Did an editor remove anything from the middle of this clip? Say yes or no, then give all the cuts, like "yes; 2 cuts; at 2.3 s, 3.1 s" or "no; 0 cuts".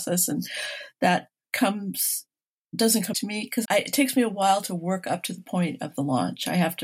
yes; 2 cuts; at 3.1 s, 3.6 s